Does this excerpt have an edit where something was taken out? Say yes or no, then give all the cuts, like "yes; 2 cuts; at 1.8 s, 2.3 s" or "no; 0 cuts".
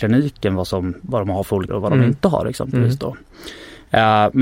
yes; 1 cut; at 1.7 s